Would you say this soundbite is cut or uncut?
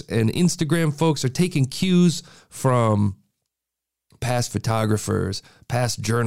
uncut